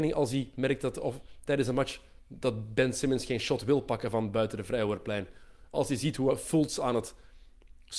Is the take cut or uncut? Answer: uncut